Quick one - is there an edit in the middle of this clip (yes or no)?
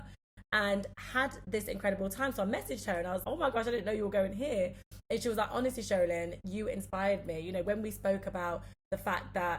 yes